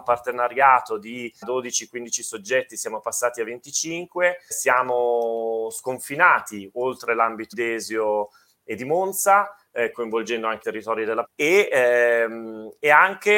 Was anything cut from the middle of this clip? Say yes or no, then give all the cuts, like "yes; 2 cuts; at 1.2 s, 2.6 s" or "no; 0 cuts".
yes; 6 cuts; at 1.4 s, 4.5 s, 7.5 s, 9.9 s, 10.6 s, 11.2 s